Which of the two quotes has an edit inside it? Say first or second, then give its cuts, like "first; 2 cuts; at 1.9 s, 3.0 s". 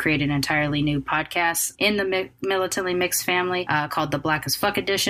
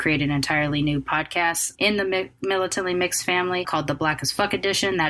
second; 1 cut; at 3.6 s